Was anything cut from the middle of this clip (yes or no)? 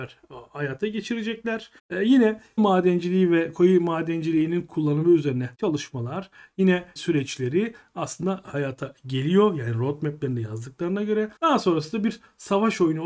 yes